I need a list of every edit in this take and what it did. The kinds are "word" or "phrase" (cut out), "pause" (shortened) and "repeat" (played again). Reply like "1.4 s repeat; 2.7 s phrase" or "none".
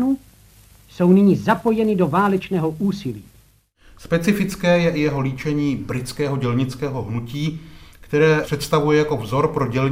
none